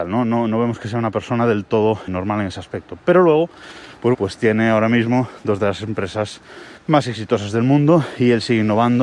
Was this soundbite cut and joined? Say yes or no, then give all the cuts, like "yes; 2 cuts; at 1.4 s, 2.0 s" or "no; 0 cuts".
yes; 3 cuts; at 2.1 s, 4.1 s, 6.8 s